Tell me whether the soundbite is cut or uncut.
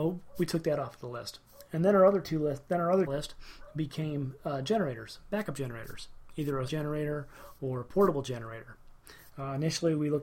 cut